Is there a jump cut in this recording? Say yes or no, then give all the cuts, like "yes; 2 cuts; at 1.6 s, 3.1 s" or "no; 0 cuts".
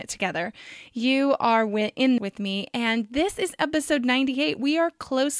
yes; 1 cut; at 2.2 s